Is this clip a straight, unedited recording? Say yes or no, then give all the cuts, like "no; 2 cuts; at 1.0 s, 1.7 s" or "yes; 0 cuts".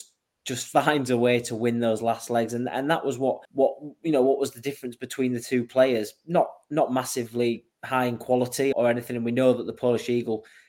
no; 3 cuts; at 3.4 s, 7.7 s, 8.7 s